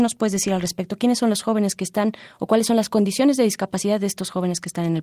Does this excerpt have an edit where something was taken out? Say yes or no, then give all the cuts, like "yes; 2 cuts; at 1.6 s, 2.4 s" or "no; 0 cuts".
no; 0 cuts